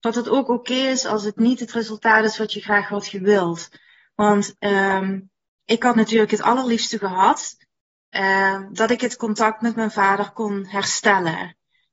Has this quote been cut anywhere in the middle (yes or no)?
no